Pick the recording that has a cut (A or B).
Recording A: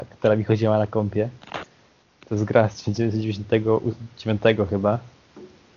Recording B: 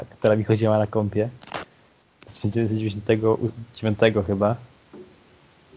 B